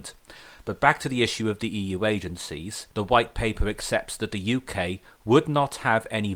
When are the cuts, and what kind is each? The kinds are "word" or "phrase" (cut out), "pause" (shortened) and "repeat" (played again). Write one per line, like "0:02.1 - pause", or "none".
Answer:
0:02.9 - pause